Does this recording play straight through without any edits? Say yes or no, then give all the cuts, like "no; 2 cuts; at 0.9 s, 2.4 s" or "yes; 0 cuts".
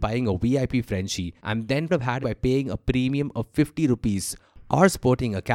no; 3 cuts; at 1.4 s, 1.9 s, 2.2 s